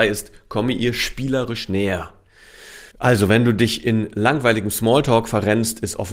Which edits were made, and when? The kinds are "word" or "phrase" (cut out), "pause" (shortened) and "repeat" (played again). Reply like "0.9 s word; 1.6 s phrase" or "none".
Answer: 2.9 s pause